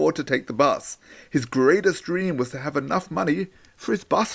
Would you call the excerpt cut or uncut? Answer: uncut